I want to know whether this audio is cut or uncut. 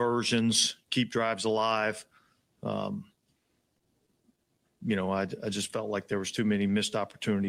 uncut